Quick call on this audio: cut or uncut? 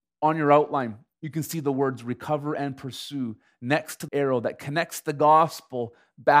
cut